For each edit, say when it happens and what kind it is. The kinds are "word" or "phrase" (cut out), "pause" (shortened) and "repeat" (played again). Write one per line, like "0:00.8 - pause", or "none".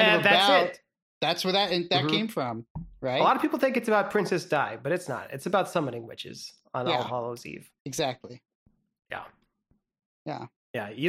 0:07.8 - pause

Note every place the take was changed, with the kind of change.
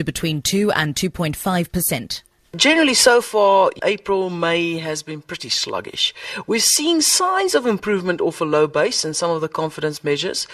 0:02.4 - pause

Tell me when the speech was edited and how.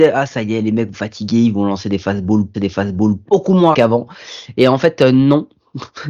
0:00.9 - word
0:02.5 - repeat
0:03.7 - word

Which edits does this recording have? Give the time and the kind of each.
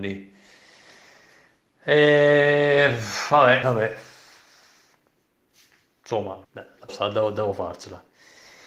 0:03.6 - word
0:06.4 - pause
0:06.9 - phrase

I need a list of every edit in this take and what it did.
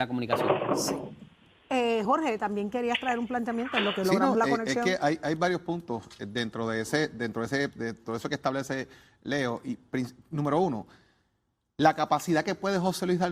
none

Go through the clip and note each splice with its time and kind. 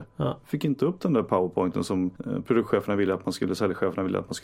0:02.2 - pause

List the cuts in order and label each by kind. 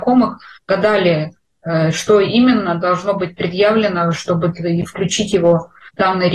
none

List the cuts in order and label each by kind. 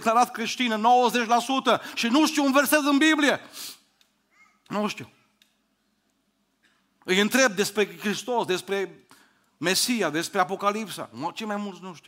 none

